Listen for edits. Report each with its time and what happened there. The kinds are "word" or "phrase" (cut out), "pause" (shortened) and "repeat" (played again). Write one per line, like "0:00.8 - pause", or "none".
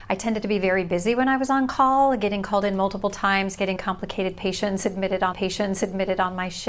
0:03.8 - word
0:05.3 - repeat